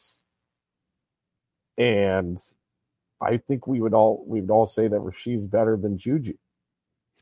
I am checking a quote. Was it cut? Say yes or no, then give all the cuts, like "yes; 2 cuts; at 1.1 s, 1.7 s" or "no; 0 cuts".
no; 0 cuts